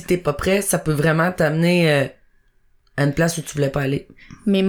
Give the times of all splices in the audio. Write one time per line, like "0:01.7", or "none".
none